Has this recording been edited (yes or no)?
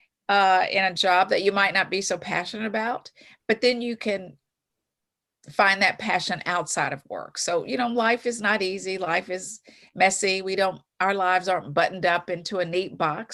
no